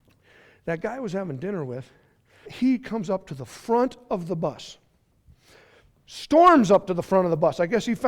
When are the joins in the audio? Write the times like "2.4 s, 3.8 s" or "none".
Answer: 2.4 s